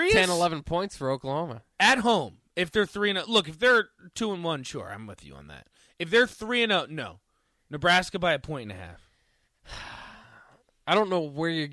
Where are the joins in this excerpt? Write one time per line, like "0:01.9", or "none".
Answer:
0:01.7